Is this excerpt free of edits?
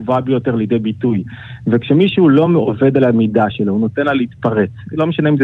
yes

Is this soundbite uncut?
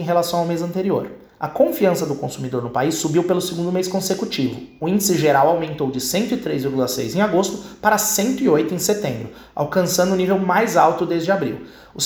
yes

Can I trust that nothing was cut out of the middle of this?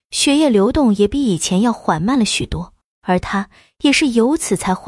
no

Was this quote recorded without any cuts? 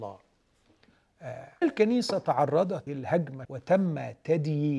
no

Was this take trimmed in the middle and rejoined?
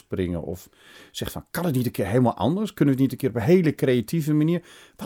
no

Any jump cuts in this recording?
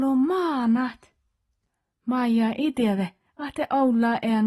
no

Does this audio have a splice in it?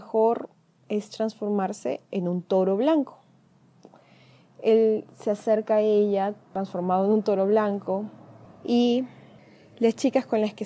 no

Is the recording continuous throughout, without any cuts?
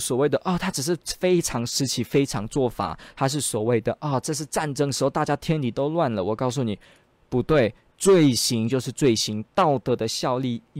yes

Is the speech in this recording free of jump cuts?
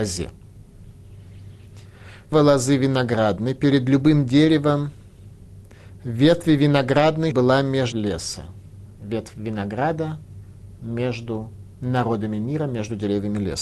no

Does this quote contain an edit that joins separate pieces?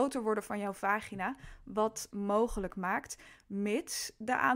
yes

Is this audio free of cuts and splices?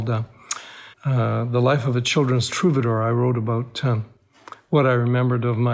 no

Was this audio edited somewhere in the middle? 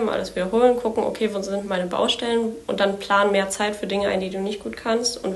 no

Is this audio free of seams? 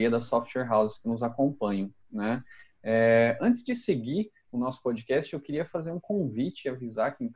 yes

